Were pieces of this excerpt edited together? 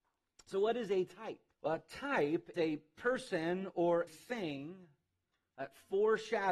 yes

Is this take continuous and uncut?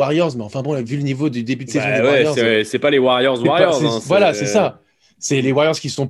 yes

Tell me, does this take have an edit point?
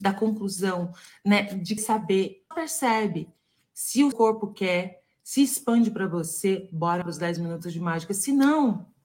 yes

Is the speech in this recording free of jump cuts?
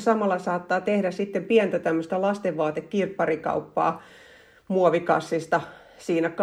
yes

